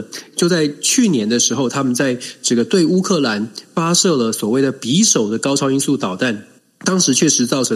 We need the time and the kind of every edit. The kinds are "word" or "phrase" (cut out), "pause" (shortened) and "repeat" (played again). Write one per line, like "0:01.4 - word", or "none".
0:06.6 - pause